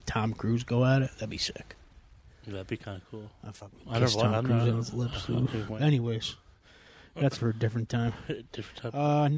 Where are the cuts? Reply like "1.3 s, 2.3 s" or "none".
7.4 s

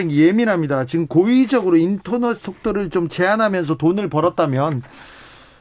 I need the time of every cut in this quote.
none

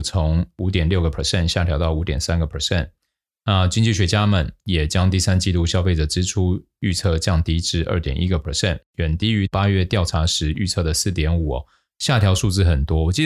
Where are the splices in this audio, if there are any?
none

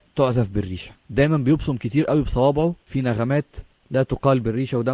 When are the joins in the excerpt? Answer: 1.0 s, 2.8 s

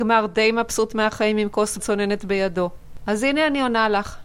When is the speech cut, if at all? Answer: 1.8 s

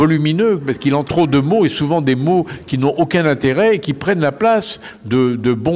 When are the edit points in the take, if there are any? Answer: 1.1 s

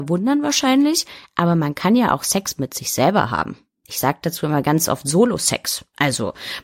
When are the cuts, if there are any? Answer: none

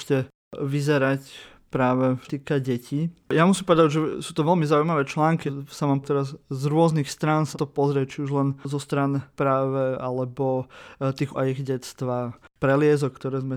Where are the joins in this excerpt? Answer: 2.3 s, 5.5 s, 6.0 s, 7.5 s, 9.3 s, 11.3 s

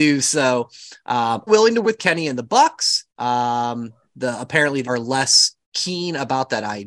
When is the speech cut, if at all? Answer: 1.5 s, 1.8 s, 3.1 s, 4.8 s, 5.6 s

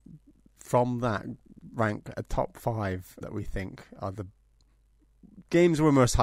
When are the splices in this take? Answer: 3.2 s

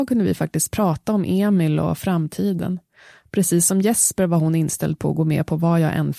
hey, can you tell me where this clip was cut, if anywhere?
none

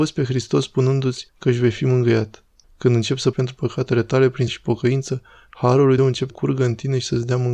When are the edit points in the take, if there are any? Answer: 1.3 s, 2.6 s, 3.3 s, 4.5 s, 6.0 s, 6.3 s

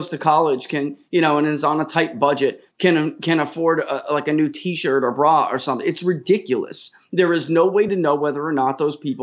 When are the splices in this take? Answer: none

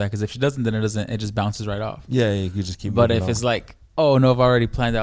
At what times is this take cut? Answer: 3.9 s

